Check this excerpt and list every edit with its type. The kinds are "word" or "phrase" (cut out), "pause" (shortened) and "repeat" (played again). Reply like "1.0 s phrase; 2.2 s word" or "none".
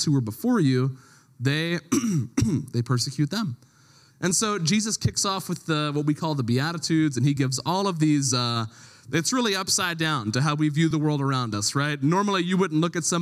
none